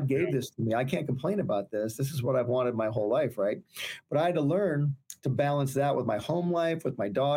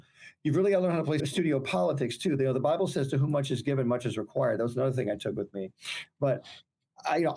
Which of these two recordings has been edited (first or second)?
second